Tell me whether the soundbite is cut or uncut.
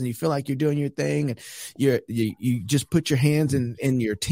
uncut